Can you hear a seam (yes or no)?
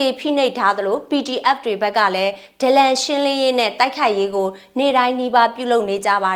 no